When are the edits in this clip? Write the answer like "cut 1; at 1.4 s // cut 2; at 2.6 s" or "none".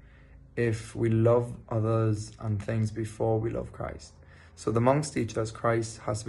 none